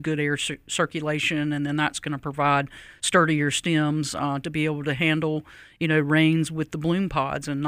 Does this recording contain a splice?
no; 0 cuts

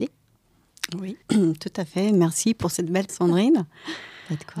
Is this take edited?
yes; 2 cuts; at 1.2 s, 3.1 s

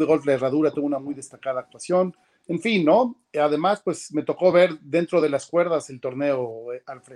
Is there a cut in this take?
no; 0 cuts

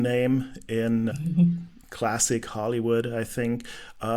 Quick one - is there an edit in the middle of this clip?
yes; 1 cut; at 1.1 s

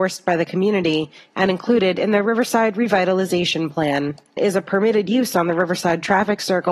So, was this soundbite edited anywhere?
yes; 1 cut; at 4.4 s

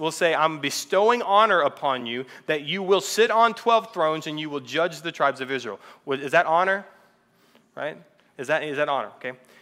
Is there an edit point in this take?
no; 0 cuts

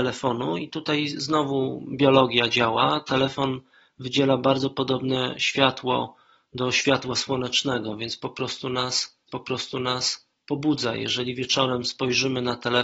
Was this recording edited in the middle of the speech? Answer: yes; 1 cut; at 9.3 s

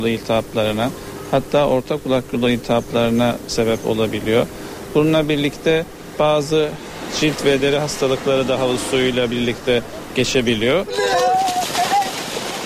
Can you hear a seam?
no; 0 cuts

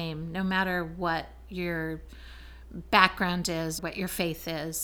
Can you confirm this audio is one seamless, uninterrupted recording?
no; 1 cut; at 3.8 s

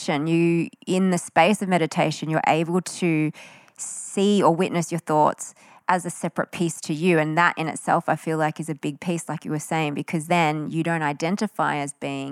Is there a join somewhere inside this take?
no; 0 cuts

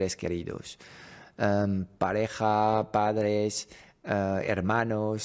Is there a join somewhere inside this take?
no; 0 cuts

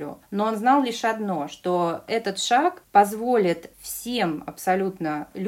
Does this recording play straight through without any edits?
yes; 0 cuts

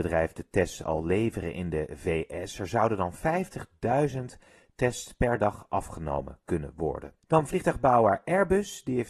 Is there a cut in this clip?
yes; 1 cut; at 7.2 s

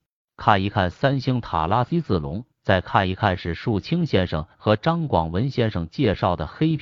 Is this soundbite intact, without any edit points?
no; 1 cut; at 2.5 s

